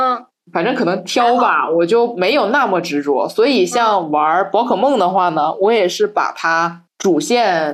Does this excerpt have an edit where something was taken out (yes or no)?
no